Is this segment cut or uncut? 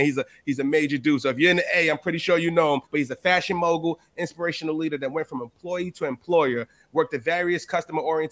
cut